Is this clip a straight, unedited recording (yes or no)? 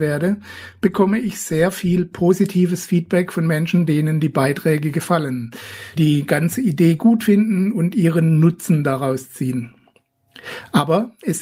no